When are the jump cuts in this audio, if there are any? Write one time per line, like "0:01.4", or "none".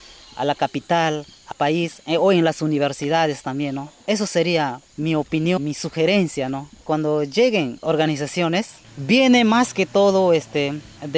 0:01.5
0:04.0
0:04.9
0:05.6
0:07.8
0:08.8